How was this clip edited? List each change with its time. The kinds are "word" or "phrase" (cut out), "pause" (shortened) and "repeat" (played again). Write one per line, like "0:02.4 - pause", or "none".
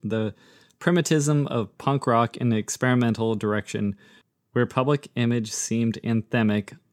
none